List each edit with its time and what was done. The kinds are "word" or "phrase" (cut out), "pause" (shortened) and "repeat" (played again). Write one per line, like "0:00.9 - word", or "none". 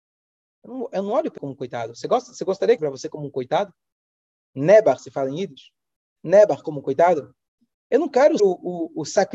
0:01.4 - word
0:02.8 - word
0:08.4 - word